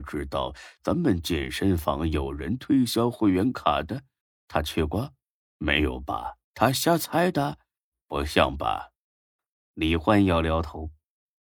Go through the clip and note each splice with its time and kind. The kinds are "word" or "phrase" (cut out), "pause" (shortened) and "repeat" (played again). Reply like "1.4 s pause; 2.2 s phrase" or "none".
4.2 s pause; 6.4 s pause; 9.4 s pause